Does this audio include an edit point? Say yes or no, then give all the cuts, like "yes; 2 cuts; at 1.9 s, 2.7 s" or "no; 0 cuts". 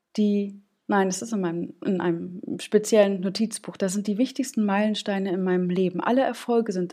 no; 0 cuts